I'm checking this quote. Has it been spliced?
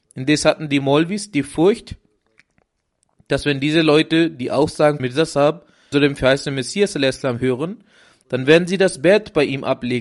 yes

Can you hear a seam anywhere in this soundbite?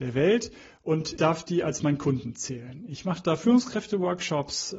yes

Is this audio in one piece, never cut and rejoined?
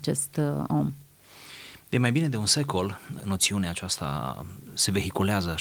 yes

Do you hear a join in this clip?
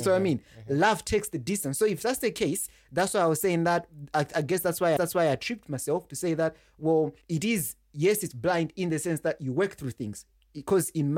yes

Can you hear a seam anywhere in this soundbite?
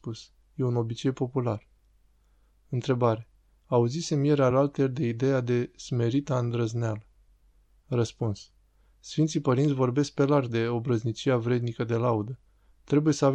no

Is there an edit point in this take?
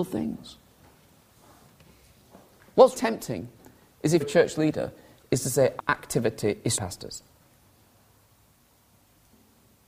yes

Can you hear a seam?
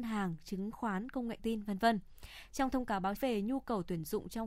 yes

